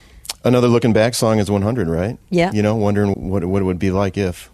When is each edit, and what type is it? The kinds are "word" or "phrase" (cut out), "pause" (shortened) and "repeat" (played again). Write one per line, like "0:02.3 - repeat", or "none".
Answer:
0:02.2 - pause
0:03.1 - word